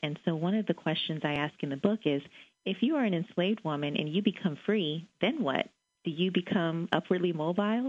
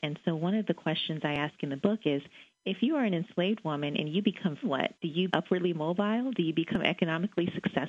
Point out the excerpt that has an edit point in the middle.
second; 3 cuts; at 4.6 s, 5.0 s, 5.3 s

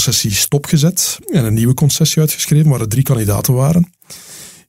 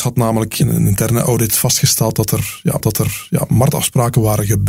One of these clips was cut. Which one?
second; 1 cut; at 2.8 s

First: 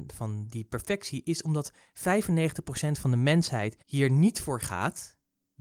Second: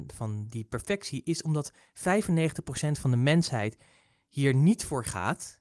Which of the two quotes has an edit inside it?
first; 1 cut; at 3.8 s

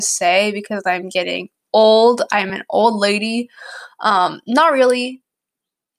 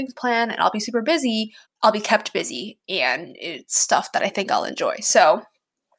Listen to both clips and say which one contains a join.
second; 1 cut; at 1.6 s

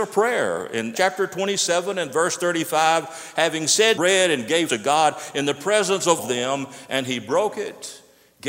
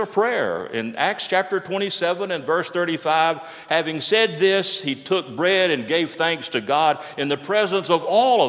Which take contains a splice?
first; 4 cuts; at 0.9 s, 3.9 s, 4.7 s, 6.2 s

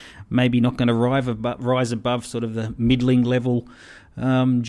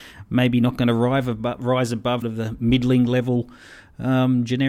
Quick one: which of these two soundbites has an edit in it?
second; 1 cut; at 2.2 s

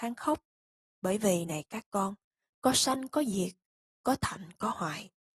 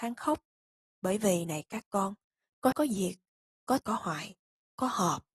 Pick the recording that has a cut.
second; 2 cuts; at 2.7 s, 3.8 s

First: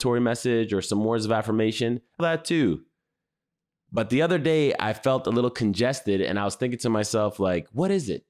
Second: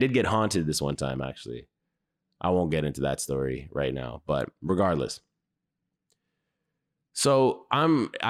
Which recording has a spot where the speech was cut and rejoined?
first; 1 cut; at 2.2 s

